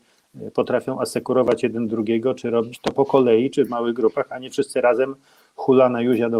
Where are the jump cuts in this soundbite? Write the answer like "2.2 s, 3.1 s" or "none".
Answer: none